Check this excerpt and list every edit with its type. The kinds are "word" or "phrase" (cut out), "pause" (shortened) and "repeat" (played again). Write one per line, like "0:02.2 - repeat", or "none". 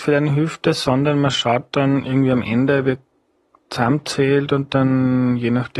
none